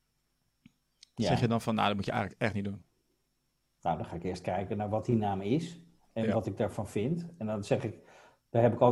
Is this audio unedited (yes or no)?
yes